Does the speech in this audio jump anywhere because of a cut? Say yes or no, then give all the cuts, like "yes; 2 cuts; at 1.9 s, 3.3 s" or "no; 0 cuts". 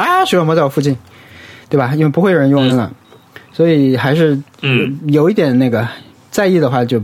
yes; 1 cut; at 2.7 s